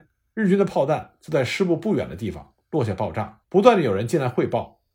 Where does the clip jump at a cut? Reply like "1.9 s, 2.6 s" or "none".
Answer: 3.4 s